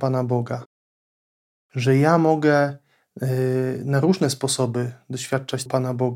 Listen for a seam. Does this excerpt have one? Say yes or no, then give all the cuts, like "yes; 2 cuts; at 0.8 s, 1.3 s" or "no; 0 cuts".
no; 0 cuts